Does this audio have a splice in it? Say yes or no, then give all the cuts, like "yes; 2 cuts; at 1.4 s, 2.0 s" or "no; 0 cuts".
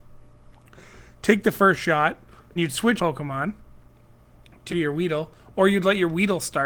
yes; 3 cuts; at 2.6 s, 3.0 s, 4.7 s